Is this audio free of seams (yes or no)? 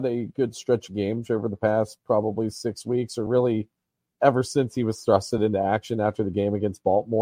yes